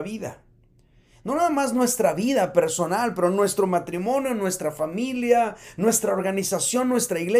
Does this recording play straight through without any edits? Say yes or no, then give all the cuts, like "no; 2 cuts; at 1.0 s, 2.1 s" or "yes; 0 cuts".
yes; 0 cuts